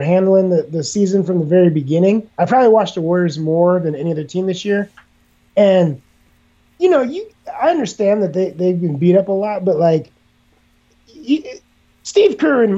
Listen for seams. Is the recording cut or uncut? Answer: uncut